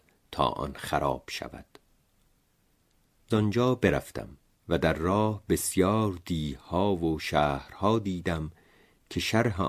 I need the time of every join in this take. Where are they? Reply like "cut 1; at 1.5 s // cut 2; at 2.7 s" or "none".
cut 1; at 3.3 s // cut 2; at 4.4 s